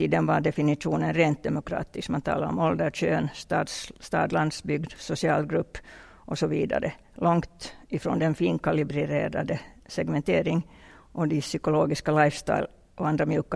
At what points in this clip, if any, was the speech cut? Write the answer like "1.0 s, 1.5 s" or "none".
none